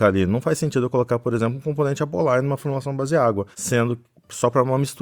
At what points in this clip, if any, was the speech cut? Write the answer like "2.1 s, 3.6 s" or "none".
3.5 s

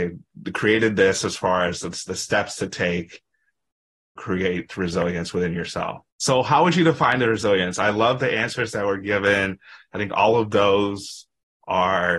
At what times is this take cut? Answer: 4.2 s, 6.1 s

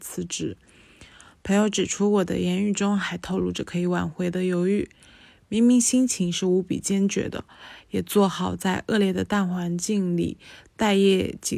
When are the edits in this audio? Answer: none

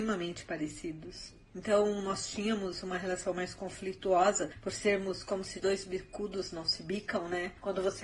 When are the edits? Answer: 5.6 s

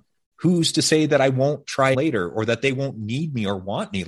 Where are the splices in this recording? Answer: 1.9 s

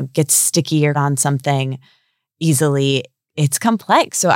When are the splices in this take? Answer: 0.9 s, 3.3 s

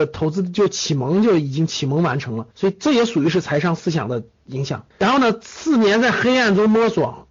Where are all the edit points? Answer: 2.5 s, 4.9 s

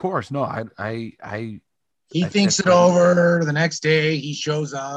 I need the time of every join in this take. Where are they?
1.9 s

